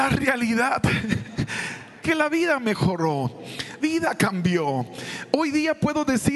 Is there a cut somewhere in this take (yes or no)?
yes